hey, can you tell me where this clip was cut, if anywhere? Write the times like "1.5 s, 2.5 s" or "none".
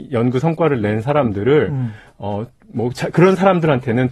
none